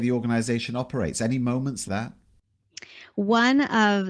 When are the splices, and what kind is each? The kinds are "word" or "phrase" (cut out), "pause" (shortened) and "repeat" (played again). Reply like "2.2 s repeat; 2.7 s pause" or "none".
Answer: 1.9 s word